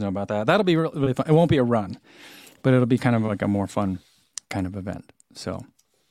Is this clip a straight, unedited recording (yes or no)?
yes